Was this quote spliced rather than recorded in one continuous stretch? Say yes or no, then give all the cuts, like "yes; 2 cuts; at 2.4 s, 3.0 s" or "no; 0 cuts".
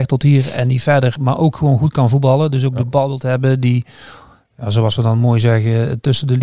no; 0 cuts